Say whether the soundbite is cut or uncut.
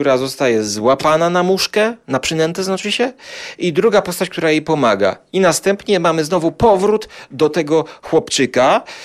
uncut